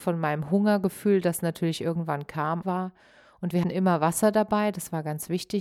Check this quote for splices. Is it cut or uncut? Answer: cut